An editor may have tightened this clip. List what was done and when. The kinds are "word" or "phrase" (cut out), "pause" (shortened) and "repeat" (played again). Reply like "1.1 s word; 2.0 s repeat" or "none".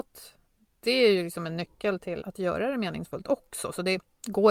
2.2 s word